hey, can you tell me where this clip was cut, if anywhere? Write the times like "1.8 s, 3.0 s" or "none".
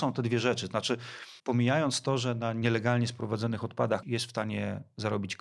1.4 s, 4.0 s